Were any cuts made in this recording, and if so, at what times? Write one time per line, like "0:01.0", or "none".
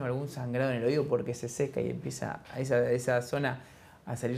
none